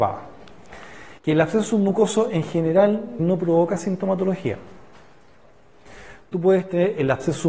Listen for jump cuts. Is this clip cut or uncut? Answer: cut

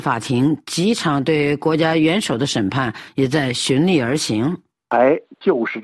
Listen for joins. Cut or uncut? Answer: uncut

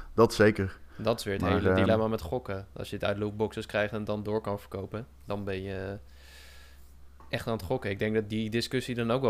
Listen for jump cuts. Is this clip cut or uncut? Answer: uncut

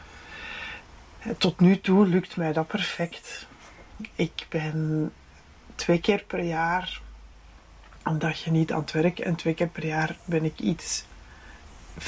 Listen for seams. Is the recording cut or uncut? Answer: uncut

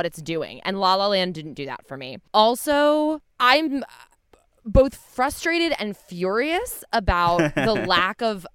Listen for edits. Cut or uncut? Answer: cut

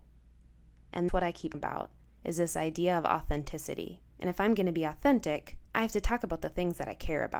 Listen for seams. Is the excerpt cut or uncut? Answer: cut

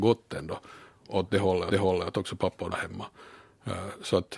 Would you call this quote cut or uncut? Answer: cut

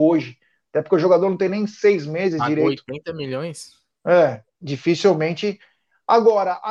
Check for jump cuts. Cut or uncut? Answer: uncut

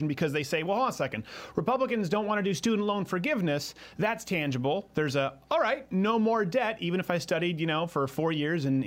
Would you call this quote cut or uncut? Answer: uncut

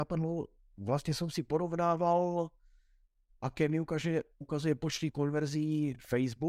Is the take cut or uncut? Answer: uncut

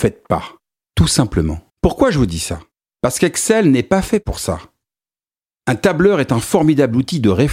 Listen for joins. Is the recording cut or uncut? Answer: cut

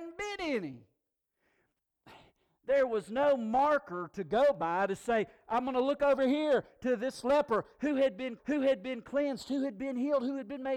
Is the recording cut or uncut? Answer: cut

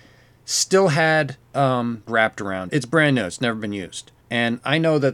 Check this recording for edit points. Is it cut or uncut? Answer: cut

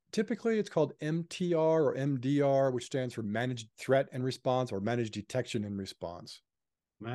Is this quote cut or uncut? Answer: cut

